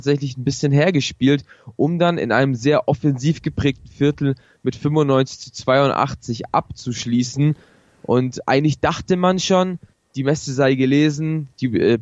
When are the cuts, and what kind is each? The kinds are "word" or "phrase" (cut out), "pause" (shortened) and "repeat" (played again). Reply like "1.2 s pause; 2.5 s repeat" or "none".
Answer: 9.9 s pause